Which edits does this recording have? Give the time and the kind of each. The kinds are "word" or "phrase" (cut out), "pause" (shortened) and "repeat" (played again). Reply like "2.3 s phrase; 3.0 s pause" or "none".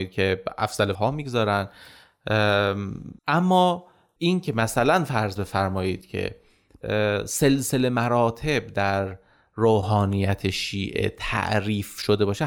0.9 s word; 3.2 s pause